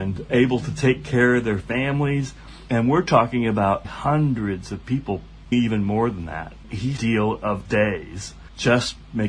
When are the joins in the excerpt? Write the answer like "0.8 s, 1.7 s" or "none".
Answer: 3.8 s, 5.5 s, 7.0 s, 7.6 s